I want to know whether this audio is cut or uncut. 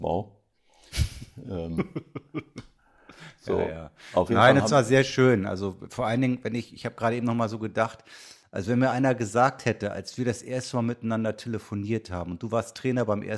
uncut